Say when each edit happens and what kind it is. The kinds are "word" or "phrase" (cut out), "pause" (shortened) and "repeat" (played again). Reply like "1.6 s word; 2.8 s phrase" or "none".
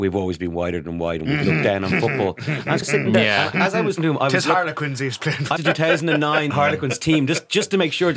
2.8 s word; 3.5 s word; 4.0 s word; 5.6 s phrase; 6.5 s word